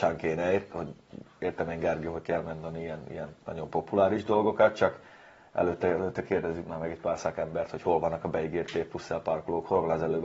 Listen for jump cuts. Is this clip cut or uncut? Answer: uncut